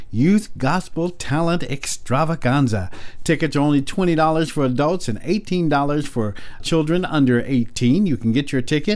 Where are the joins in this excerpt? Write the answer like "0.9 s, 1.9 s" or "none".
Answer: 6.6 s